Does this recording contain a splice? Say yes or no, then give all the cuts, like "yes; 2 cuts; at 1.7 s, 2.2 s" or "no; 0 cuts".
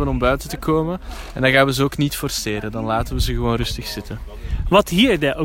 no; 0 cuts